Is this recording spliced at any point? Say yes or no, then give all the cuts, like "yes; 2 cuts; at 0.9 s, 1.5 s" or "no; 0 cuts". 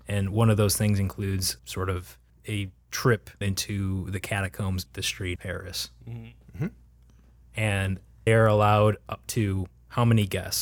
yes; 6 cuts; at 1.6 s, 2.3 s, 3.4 s, 4.9 s, 5.4 s, 8.3 s